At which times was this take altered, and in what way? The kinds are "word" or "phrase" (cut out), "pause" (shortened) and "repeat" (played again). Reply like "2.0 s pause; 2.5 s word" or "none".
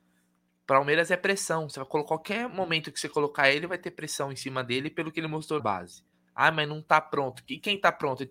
5.6 s word; 6.1 s pause